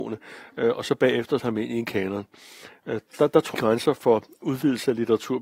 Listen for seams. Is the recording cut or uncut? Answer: cut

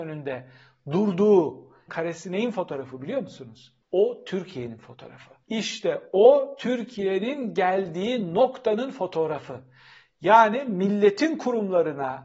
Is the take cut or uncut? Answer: cut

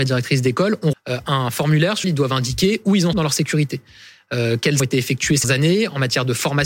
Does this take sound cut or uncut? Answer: cut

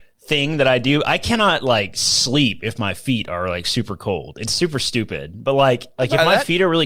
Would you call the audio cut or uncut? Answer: uncut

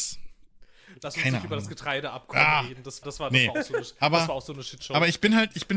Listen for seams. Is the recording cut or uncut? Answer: cut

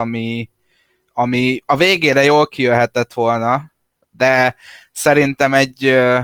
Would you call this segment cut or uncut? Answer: uncut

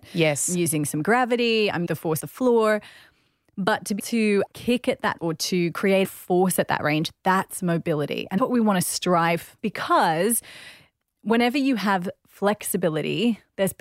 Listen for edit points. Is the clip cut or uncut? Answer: cut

